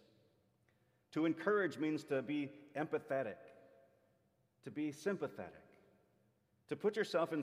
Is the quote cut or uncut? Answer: uncut